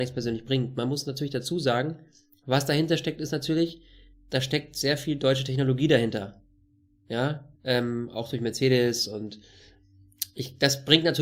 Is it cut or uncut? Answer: cut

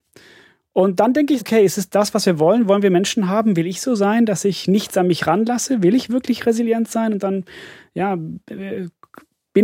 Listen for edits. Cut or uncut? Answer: cut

